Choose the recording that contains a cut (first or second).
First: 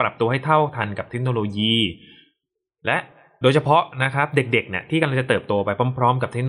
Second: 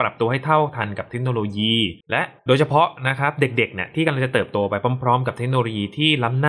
second